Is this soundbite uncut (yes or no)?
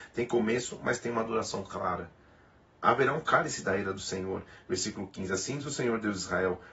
yes